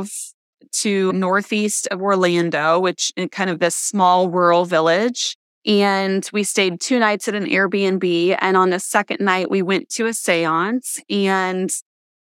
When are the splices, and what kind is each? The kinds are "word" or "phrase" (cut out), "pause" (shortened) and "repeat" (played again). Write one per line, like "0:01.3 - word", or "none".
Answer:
0:05.5 - pause